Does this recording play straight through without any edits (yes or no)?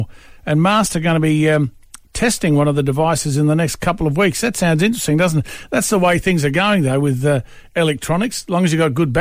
yes